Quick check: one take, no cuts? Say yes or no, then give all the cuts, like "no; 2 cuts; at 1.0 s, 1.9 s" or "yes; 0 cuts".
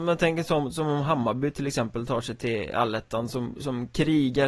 yes; 0 cuts